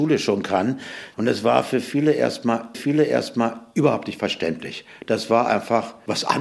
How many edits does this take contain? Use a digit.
1